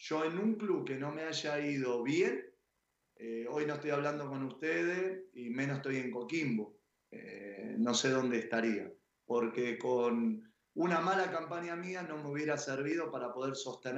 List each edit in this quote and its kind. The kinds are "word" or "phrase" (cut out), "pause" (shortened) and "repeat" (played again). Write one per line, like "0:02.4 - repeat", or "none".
none